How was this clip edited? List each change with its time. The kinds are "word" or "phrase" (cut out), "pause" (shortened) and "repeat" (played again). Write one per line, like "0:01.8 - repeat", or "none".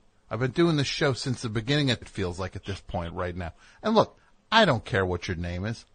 0:02.0 - word